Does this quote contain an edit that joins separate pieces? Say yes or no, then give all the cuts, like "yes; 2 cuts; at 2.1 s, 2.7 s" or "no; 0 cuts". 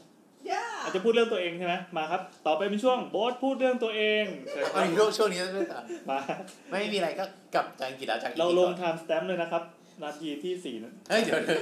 no; 0 cuts